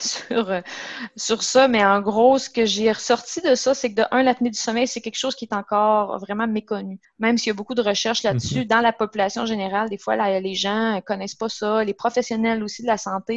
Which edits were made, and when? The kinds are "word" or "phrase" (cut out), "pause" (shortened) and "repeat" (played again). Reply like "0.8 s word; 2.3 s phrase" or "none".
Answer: 7.0 s pause